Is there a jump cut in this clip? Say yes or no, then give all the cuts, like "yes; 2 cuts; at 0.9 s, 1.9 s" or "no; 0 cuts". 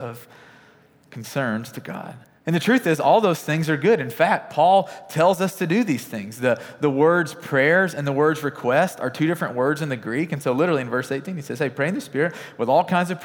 yes; 1 cut; at 2.2 s